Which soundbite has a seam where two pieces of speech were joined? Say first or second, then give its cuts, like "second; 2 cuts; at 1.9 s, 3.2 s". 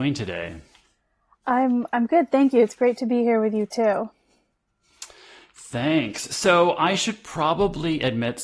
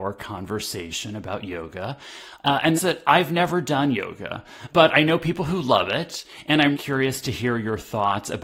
second; 3 cuts; at 2.7 s, 4.7 s, 6.7 s